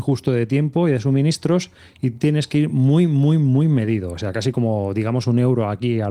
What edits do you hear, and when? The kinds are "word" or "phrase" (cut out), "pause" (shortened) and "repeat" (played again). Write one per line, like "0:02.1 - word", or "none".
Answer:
none